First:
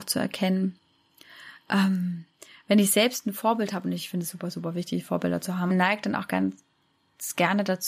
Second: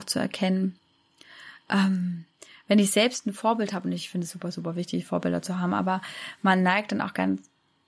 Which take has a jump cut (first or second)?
first